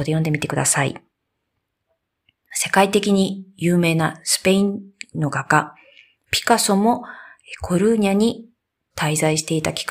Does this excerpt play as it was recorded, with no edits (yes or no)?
yes